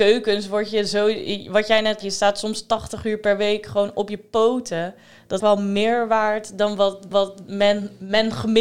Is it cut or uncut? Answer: cut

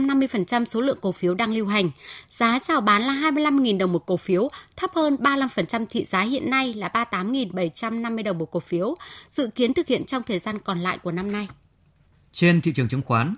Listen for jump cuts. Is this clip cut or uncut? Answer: uncut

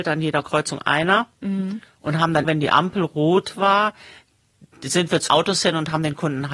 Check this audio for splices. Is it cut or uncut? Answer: cut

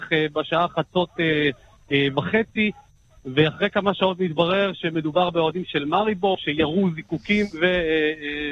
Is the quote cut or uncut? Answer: uncut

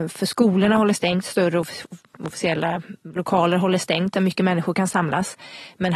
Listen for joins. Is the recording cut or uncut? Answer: uncut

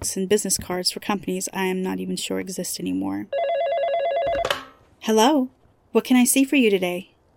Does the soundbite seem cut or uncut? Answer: uncut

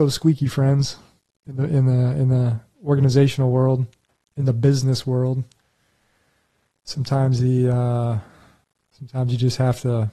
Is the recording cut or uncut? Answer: uncut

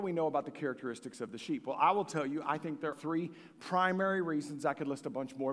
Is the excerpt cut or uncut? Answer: cut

